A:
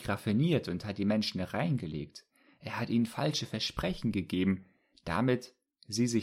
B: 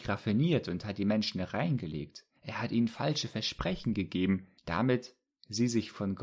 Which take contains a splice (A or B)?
B